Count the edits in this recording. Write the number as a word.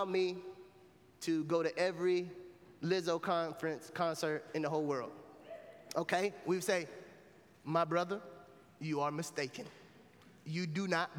zero